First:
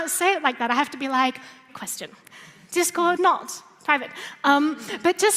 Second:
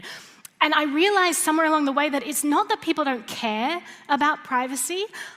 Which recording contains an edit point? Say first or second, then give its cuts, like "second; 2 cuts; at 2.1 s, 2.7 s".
first; 2 cuts; at 1.7 s, 3.2 s